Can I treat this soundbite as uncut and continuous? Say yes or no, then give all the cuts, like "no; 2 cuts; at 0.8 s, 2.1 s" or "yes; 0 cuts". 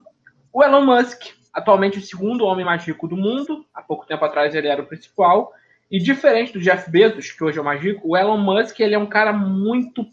yes; 0 cuts